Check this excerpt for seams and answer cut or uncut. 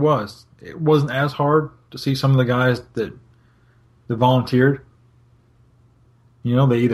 uncut